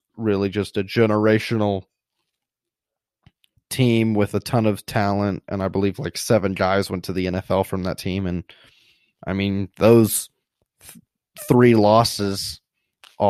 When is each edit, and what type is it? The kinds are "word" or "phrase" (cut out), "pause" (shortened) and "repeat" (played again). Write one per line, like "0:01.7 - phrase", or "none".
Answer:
0:10.4 - pause